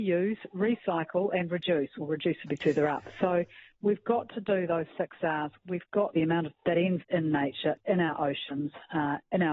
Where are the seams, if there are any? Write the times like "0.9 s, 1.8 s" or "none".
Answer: 6.1 s, 6.5 s, 7.0 s